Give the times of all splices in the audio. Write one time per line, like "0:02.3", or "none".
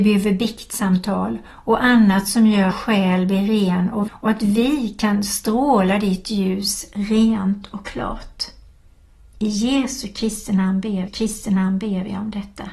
0:02.7
0:04.1
0:11.1